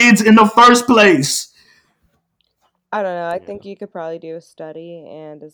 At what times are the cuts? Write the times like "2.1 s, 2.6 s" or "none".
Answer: none